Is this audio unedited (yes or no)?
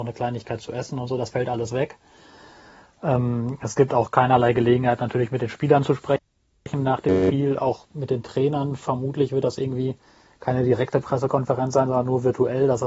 yes